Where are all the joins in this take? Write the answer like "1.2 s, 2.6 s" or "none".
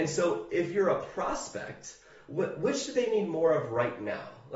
none